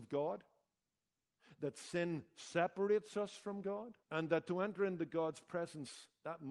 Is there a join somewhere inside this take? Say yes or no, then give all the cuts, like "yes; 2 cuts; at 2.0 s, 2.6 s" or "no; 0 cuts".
yes; 1 cut; at 4.0 s